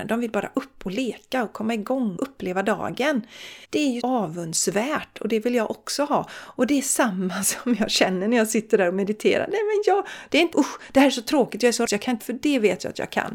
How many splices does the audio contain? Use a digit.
6